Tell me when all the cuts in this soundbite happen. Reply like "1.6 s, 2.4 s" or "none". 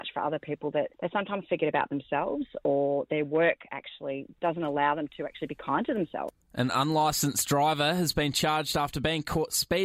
none